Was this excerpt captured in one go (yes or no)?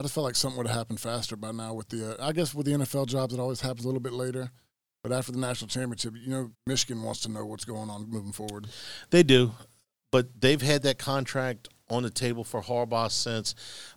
no